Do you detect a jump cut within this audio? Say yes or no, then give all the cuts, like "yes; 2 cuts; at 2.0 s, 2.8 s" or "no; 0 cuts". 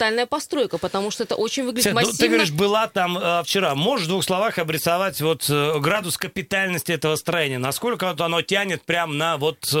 no; 0 cuts